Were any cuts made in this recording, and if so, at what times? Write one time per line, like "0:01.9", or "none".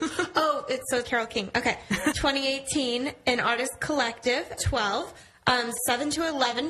0:01.0
0:02.1
0:04.6
0:05.8

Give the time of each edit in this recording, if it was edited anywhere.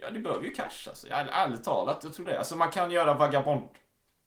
0:02.3

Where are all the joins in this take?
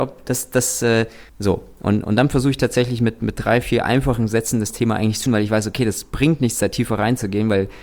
0:01.3
0:05.3

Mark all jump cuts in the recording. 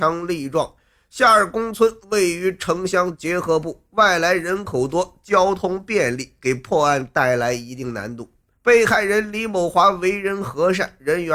0:08.5

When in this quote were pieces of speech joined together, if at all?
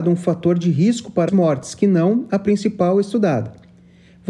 0:01.3

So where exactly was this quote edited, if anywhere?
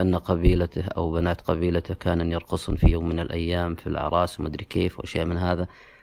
none

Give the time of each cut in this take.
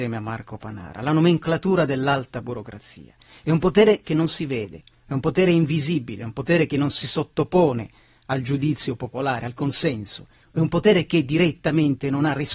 none

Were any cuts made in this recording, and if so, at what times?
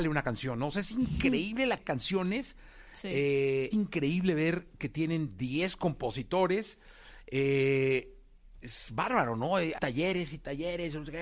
0:01.8
0:03.7
0:04.8
0:08.6
0:09.8

